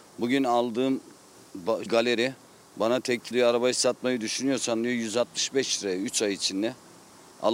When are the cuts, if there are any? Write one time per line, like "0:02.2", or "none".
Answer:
0:01.9
0:03.3